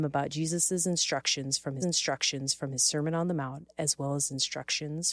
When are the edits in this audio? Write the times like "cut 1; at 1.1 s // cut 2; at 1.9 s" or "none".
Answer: cut 1; at 1.8 s